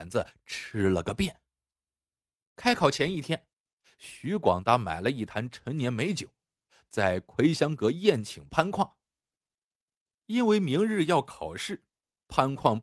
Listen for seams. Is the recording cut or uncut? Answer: uncut